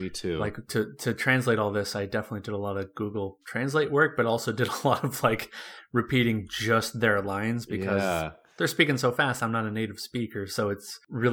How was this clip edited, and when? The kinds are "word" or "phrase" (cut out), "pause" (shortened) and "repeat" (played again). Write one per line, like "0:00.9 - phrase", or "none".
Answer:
none